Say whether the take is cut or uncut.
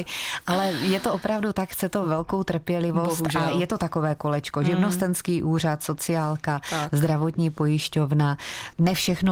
uncut